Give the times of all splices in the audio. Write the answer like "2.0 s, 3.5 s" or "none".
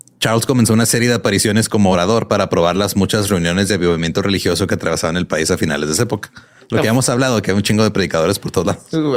none